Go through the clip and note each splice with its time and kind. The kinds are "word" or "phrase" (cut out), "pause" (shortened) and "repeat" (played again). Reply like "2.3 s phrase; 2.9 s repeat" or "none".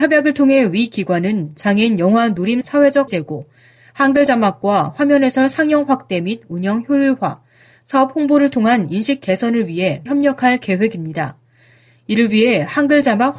2.6 s word; 3.1 s word; 10.1 s word